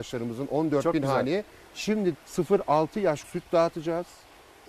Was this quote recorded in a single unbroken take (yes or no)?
no